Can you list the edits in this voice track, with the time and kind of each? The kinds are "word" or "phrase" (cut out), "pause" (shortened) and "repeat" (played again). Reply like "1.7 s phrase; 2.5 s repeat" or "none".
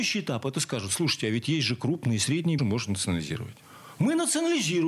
2.6 s phrase